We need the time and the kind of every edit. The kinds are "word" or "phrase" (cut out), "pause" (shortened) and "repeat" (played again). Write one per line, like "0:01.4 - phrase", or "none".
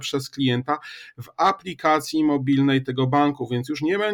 none